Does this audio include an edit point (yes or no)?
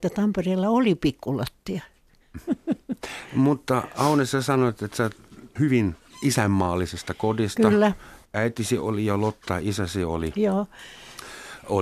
yes